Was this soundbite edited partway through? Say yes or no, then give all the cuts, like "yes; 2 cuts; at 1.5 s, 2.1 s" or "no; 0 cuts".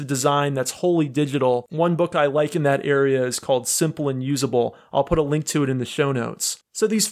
no; 0 cuts